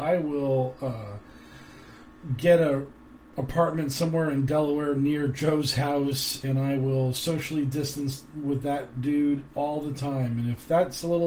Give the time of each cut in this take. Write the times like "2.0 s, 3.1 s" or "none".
none